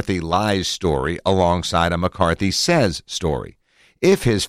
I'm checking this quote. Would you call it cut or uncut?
uncut